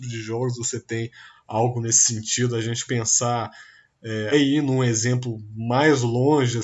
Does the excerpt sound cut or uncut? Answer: cut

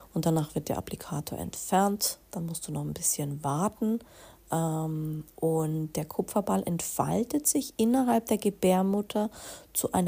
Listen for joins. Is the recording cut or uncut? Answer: uncut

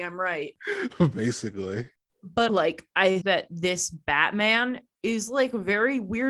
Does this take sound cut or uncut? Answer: cut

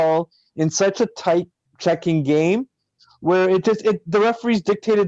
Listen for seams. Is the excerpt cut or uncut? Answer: cut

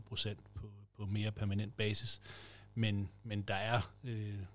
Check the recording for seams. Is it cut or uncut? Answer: uncut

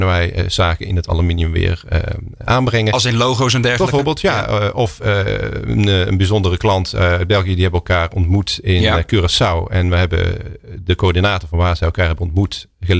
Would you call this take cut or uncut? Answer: uncut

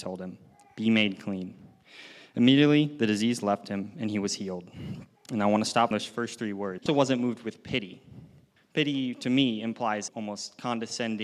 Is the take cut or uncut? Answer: cut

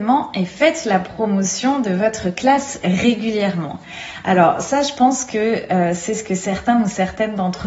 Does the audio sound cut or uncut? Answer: uncut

